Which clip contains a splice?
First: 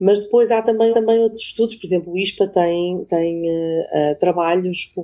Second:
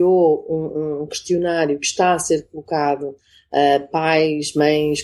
first; 1 cut; at 0.9 s

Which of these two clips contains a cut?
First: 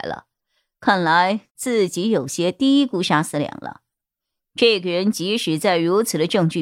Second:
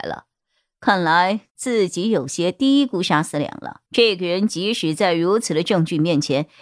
second; 1 cut; at 3.9 s

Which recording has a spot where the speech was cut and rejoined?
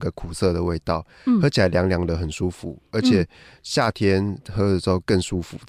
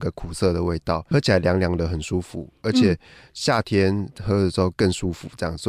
second; 1 cut; at 1.1 s

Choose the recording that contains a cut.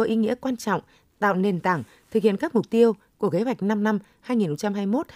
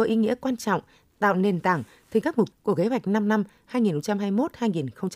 second; 2 cuts; at 2.2 s, 2.5 s

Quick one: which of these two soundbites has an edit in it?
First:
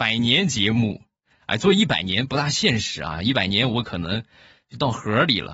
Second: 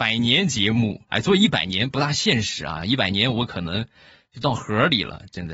second; 1 cut; at 1.1 s

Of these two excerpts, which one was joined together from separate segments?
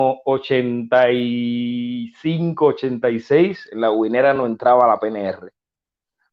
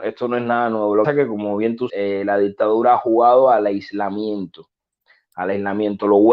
second; 2 cuts; at 1.0 s, 1.9 s

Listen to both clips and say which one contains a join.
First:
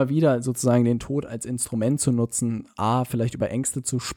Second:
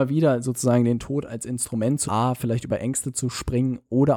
second; 1 cut; at 2.0 s

